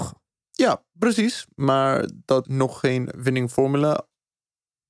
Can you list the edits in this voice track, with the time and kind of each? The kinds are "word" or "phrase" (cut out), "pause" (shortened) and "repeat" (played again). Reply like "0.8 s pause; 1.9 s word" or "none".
2.4 s word